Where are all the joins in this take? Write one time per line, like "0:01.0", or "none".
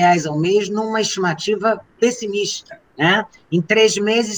0:02.9